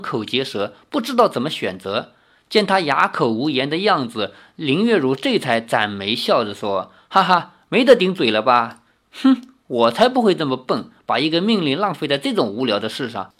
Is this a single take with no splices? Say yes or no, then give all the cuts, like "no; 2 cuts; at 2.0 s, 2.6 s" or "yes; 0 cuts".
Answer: yes; 0 cuts